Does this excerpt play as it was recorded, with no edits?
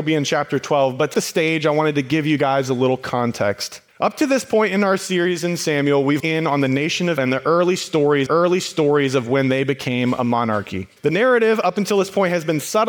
no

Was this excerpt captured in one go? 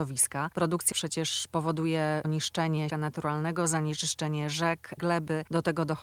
no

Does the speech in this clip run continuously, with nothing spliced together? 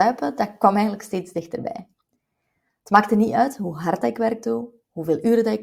yes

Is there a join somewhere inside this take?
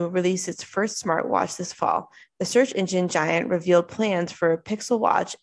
no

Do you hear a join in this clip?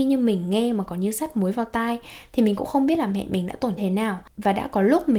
yes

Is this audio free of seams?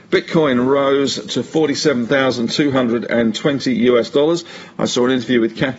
yes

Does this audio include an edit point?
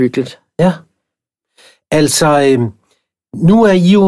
no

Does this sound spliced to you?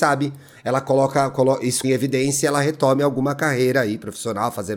yes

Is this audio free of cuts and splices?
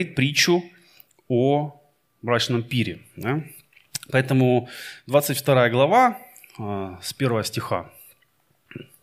yes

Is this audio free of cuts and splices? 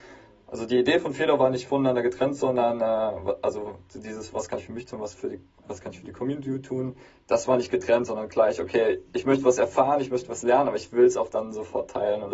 yes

